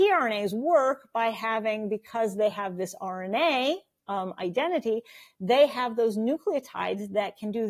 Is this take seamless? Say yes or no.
yes